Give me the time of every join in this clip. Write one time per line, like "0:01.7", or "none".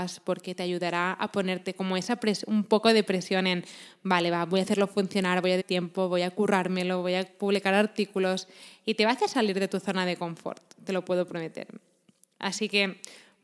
0:05.6